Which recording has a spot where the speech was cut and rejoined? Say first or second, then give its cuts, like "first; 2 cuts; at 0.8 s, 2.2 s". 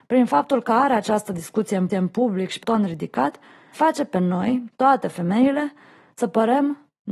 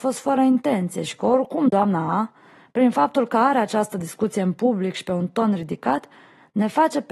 first; 3 cuts; at 1.9 s, 2.6 s, 3.7 s